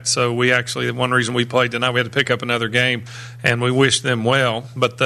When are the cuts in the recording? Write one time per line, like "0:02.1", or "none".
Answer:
none

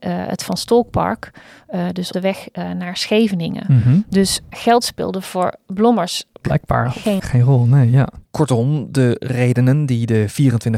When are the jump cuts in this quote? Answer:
0:02.1
0:04.5
0:06.4
0:07.2
0:08.3

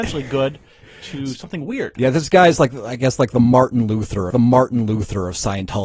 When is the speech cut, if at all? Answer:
0:04.3

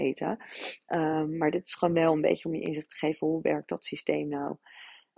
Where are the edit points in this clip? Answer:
none

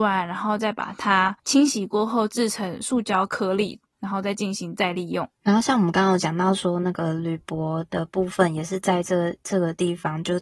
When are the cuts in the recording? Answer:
0:01.4
0:05.4

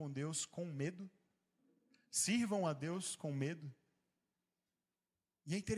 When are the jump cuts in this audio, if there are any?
none

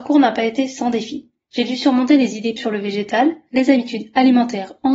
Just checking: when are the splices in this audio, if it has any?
0:02.6

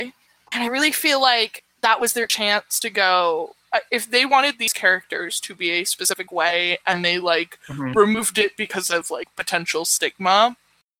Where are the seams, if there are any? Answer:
0:03.9

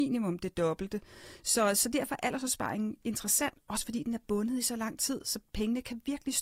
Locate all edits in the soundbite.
none

